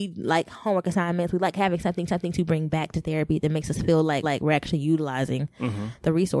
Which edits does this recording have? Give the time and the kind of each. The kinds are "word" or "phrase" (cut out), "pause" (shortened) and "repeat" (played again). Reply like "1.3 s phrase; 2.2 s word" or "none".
2.1 s repeat; 4.2 s repeat